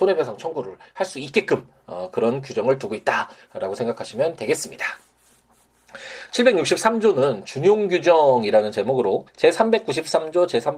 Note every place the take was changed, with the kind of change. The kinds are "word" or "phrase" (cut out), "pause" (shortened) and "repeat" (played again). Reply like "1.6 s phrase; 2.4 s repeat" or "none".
9.3 s pause